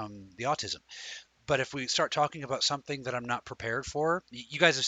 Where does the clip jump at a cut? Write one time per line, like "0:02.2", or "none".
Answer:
none